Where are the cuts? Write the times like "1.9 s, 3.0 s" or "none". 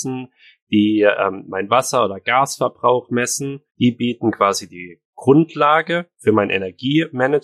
3.7 s